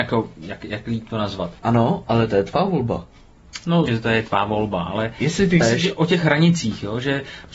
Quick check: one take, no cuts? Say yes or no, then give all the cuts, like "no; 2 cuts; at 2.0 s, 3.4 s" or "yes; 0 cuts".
no; 3 cuts; at 1.6 s, 3.9 s, 5.6 s